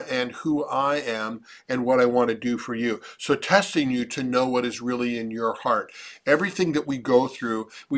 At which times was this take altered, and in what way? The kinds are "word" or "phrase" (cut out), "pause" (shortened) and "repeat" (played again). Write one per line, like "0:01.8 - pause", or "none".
none